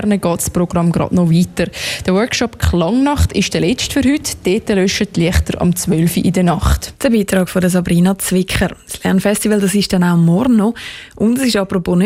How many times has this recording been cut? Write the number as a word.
one